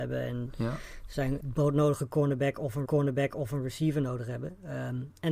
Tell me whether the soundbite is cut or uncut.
cut